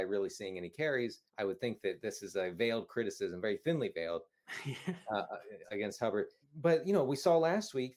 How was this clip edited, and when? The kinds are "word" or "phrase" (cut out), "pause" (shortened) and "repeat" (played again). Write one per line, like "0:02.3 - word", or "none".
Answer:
0:01.3 - pause
0:05.6 - word